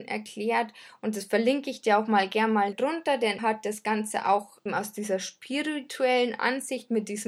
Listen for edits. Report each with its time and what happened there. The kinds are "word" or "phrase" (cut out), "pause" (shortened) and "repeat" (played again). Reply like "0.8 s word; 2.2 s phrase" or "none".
2.7 s word; 3.4 s word; 4.7 s word